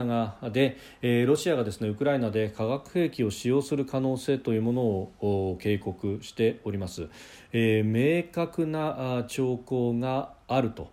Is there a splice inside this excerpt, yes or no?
no